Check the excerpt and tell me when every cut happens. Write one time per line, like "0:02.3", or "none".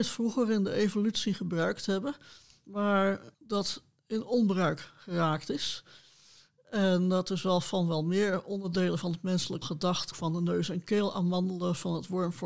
0:03.3
0:09.6
0:10.1